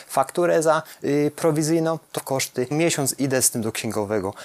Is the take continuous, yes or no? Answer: no